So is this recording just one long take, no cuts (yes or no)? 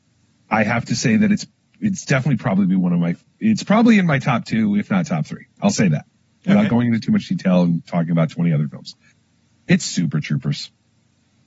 yes